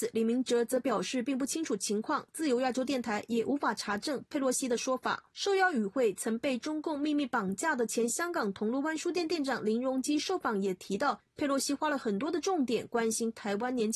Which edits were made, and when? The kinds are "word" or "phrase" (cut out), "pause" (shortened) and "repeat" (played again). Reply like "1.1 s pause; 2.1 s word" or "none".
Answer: 5.3 s pause

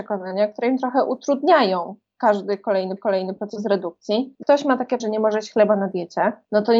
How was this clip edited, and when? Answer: 3.0 s repeat; 4.4 s word; 5.0 s word

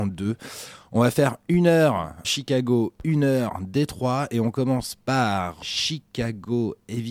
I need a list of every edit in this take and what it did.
2.2 s word; 5.6 s word

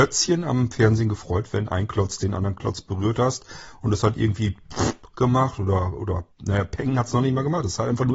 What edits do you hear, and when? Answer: 6.3 s pause

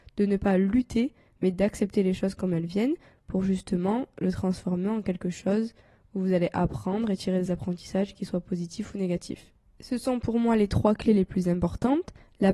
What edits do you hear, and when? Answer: none

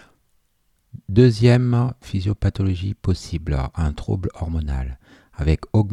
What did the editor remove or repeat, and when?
none

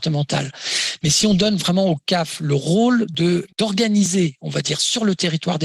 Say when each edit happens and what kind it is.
3.5 s pause

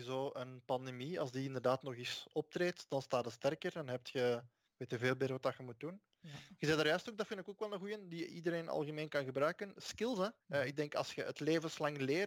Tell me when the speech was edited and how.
4.7 s pause; 10.4 s pause

